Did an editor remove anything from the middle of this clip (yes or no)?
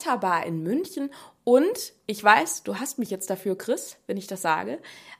no